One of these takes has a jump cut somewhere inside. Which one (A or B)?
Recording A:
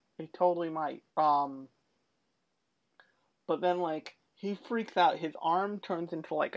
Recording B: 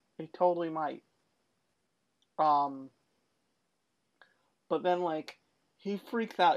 A